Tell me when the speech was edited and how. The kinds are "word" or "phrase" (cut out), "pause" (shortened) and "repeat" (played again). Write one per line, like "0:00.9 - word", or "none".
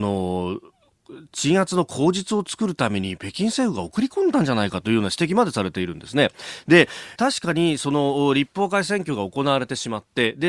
0:07.2 - phrase